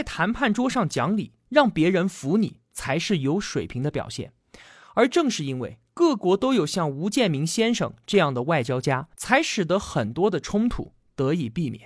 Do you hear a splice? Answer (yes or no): yes